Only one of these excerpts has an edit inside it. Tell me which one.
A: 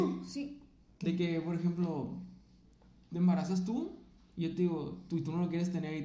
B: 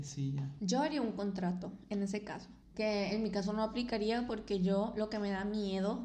B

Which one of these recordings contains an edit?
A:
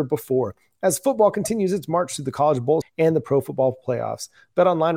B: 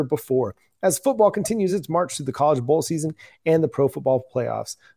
A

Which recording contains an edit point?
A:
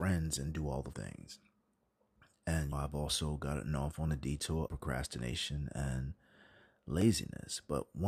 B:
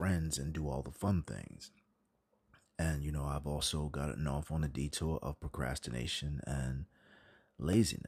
A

